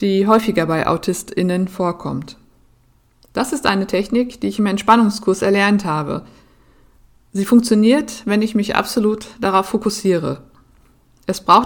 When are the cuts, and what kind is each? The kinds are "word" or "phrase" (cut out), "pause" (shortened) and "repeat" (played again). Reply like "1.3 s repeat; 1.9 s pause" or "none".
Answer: none

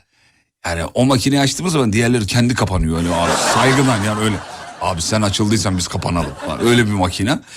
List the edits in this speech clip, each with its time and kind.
none

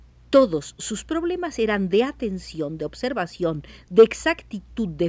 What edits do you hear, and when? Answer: none

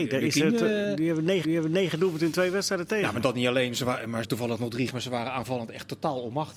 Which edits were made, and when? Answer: 1.4 s repeat; 4.2 s phrase; 4.9 s word

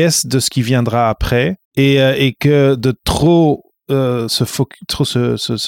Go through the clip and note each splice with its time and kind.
1.6 s pause

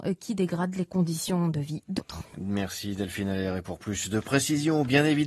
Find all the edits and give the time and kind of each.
2.0 s word

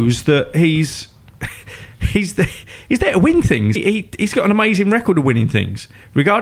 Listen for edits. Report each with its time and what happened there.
3.8 s word

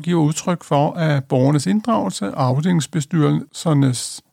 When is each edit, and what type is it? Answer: none

